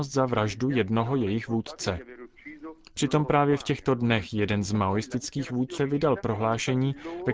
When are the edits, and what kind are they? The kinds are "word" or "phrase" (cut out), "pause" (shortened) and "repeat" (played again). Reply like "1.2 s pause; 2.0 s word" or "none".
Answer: 5.8 s phrase